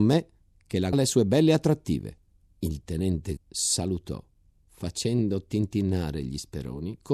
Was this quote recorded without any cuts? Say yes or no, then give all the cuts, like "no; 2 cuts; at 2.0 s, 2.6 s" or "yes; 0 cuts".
no; 3 cuts; at 0.9 s, 2.3 s, 3.4 s